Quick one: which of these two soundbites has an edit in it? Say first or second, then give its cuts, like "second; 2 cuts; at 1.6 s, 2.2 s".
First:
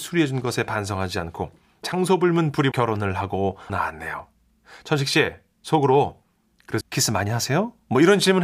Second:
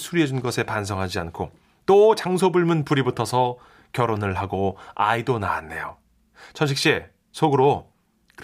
first; 4 cuts; at 1.8 s, 2.7 s, 3.7 s, 6.8 s